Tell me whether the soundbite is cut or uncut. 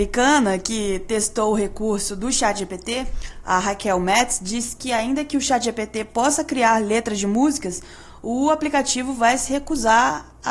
uncut